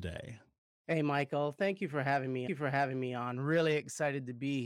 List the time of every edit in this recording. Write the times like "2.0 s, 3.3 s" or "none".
2.5 s

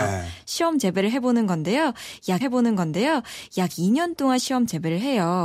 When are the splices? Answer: 2.4 s

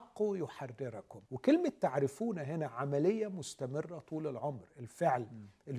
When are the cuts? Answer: 1.2 s

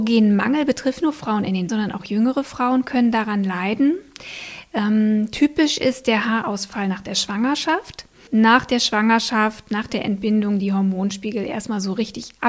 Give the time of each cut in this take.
1.0 s, 1.7 s, 8.3 s

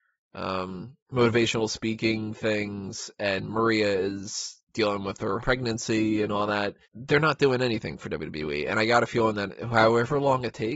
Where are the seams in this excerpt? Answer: 4.7 s, 5.4 s, 6.8 s

